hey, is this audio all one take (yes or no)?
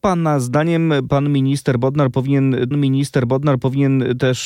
no